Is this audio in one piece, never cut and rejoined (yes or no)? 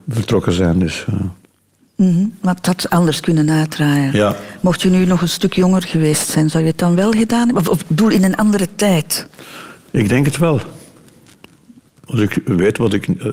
yes